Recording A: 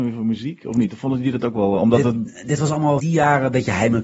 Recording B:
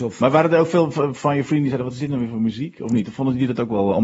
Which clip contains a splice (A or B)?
A